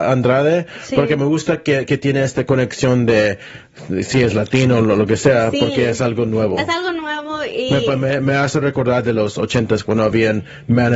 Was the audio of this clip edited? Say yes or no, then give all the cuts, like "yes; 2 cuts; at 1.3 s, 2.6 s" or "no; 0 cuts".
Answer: no; 0 cuts